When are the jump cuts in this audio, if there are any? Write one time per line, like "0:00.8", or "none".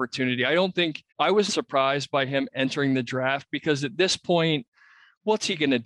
0:01.1
0:01.5